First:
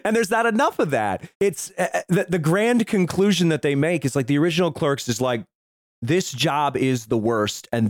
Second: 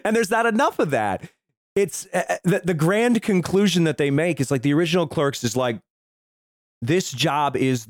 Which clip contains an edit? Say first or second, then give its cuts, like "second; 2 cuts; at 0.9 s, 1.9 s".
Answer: first; 2 cuts; at 1.3 s, 5.6 s